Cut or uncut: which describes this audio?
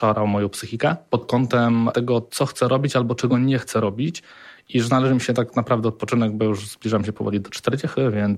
uncut